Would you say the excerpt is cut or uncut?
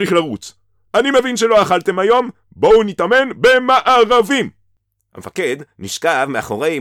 uncut